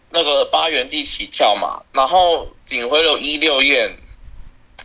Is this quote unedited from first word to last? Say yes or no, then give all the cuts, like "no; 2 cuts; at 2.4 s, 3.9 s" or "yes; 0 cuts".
no; 1 cut; at 2.6 s